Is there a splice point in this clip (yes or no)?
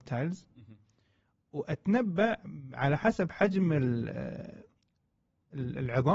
no